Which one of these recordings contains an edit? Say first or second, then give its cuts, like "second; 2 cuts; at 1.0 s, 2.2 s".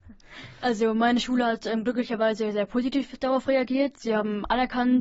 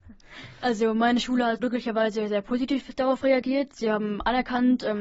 second; 1 cut; at 1.6 s